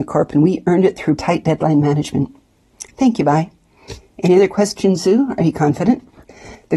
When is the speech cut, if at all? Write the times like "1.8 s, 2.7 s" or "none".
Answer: 1.2 s

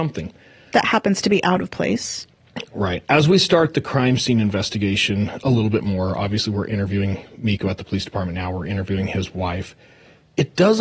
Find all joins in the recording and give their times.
none

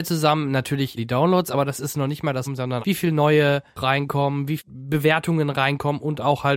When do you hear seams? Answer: 1.0 s, 2.5 s, 2.8 s, 3.8 s, 4.6 s

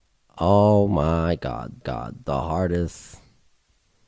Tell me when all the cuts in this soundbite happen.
1.8 s

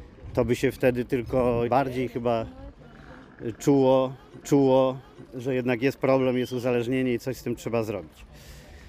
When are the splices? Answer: 1.7 s, 4.4 s

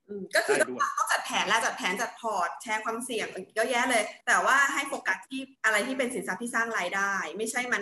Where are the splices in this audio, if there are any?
4.2 s, 5.6 s

